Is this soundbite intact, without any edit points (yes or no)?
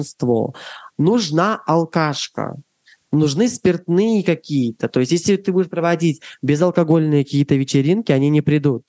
yes